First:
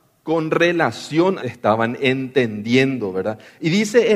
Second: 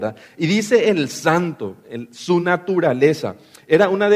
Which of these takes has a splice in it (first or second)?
first